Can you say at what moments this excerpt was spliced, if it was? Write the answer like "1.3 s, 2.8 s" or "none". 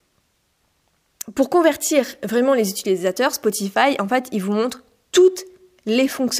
none